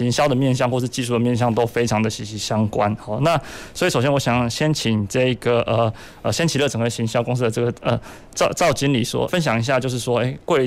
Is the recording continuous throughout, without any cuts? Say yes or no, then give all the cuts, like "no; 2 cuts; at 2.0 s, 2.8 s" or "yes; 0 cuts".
no; 1 cut; at 9.3 s